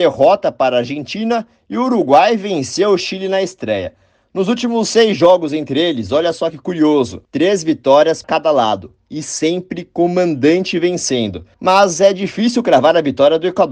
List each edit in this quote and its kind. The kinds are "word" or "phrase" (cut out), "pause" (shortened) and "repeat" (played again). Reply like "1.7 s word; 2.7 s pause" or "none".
7.2 s pause; 8.2 s word; 11.5 s pause